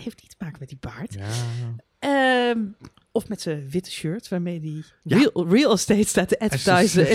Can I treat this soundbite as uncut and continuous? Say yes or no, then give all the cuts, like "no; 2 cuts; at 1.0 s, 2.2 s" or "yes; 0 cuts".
yes; 0 cuts